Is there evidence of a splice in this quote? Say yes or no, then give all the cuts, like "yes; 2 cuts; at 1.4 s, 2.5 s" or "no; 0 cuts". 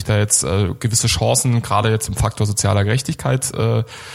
no; 0 cuts